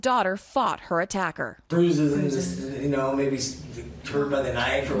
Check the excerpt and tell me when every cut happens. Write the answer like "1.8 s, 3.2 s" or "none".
none